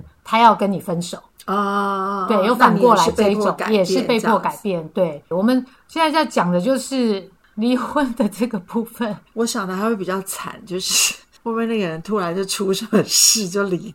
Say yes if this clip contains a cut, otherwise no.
yes